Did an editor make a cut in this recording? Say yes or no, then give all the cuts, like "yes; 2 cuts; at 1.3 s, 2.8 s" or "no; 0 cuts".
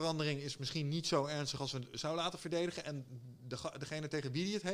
no; 0 cuts